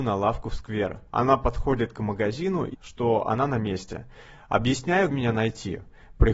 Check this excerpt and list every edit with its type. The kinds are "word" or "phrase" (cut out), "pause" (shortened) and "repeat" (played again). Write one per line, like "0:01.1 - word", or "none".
0:01.1 - pause
0:02.7 - word
0:05.1 - word